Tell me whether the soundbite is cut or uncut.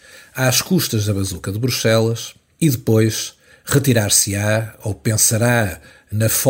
uncut